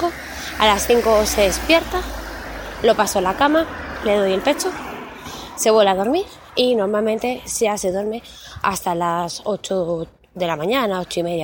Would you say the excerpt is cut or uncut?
uncut